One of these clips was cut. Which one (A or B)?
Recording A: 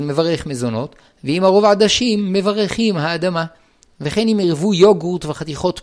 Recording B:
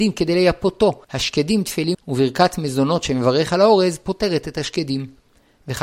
B